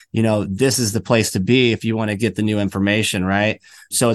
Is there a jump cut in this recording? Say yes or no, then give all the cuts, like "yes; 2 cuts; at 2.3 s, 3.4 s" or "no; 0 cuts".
no; 0 cuts